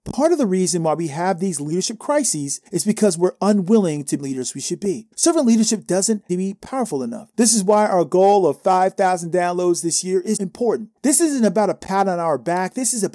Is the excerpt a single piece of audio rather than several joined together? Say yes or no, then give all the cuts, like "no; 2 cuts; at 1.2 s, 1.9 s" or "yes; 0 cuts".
no; 7 cuts; at 2.7 s, 4.2 s, 5.1 s, 6.3 s, 7.3 s, 10.4 s, 11.0 s